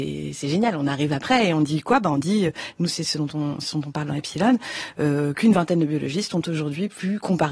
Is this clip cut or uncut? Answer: uncut